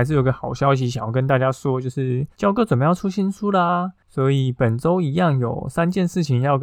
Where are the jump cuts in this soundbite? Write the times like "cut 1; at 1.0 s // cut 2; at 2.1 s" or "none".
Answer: cut 1; at 2.3 s

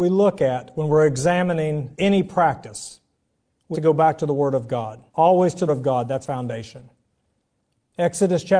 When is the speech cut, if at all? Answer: cut 1; at 1.9 s // cut 2; at 3.7 s // cut 3; at 5.1 s // cut 4; at 5.7 s // cut 5; at 6.2 s

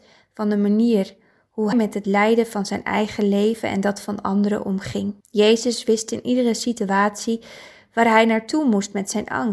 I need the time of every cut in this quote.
cut 1; at 1.7 s // cut 2; at 5.2 s

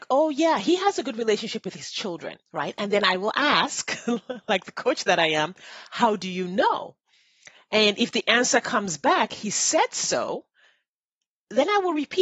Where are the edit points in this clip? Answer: cut 1; at 2.4 s

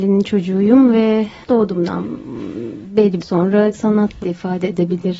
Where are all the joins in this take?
cut 1; at 1.4 s // cut 2; at 3.2 s // cut 3; at 3.7 s // cut 4; at 4.2 s

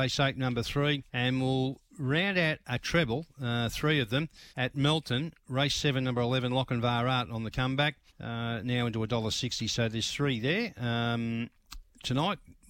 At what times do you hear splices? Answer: cut 1; at 1.1 s // cut 2; at 4.5 s // cut 3; at 8.1 s

